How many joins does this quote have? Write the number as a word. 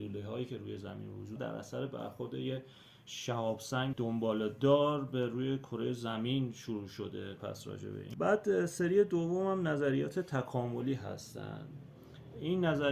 four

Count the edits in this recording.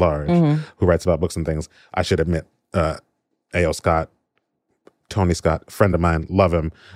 zero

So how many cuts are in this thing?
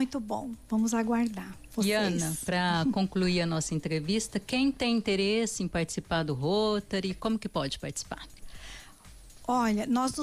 zero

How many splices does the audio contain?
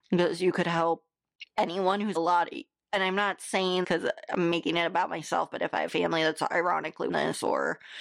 four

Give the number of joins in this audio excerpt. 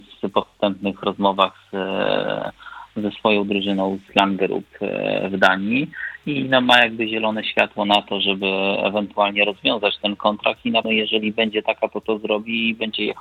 two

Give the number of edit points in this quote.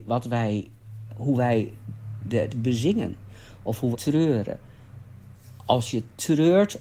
four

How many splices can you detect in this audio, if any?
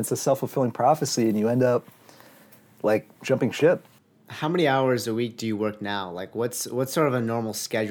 zero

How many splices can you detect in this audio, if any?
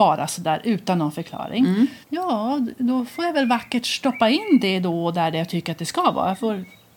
one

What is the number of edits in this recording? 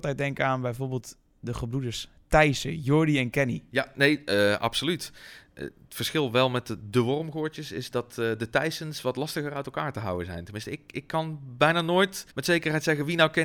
one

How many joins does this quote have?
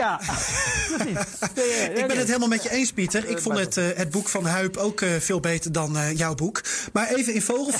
zero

